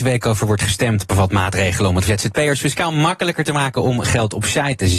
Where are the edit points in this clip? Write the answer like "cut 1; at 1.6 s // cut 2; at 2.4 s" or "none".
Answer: cut 1; at 2.0 s